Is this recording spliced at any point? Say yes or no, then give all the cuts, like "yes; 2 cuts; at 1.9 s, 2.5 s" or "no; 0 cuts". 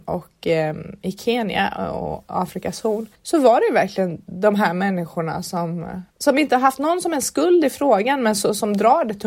yes; 2 cuts; at 3.1 s, 6.1 s